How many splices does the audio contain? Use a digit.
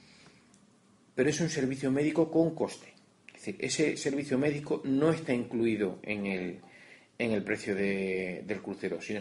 0